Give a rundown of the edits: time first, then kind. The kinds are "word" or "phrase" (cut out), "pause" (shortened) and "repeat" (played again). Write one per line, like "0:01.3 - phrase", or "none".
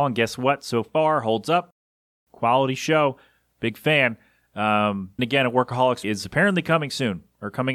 0:05.2 - word
0:06.0 - word